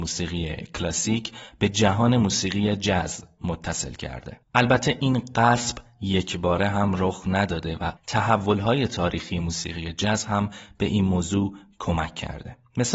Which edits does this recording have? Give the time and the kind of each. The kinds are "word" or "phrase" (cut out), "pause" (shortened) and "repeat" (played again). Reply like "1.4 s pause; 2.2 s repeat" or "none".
4.4 s pause; 8.0 s pause